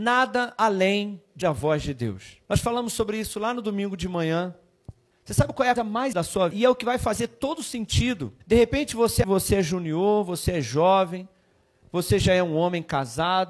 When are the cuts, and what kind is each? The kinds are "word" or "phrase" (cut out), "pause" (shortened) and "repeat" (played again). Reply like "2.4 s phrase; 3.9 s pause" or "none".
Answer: 1.4 s word; 2.5 s pause; 5.1 s pause; 5.8 s word; 6.1 s word; 6.5 s word; 8.4 s pause; 9.2 s word

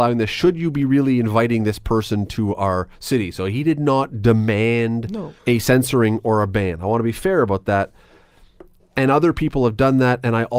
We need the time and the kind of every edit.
3.0 s pause; 5.4 s pause; 8.8 s pause

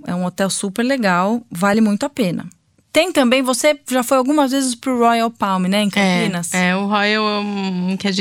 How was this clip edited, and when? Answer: none

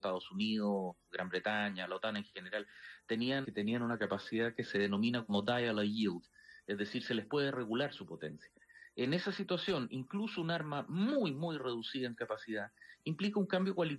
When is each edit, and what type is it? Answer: 3.4 s phrase

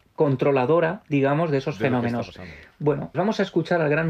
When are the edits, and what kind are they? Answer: 3.1 s word

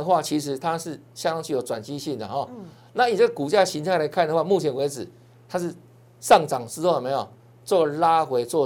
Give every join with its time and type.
none

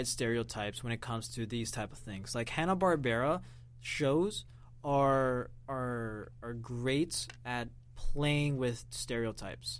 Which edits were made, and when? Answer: none

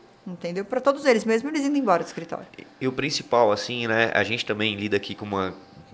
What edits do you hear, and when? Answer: 2.5 s pause

